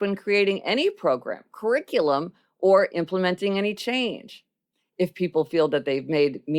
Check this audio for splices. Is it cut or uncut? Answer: uncut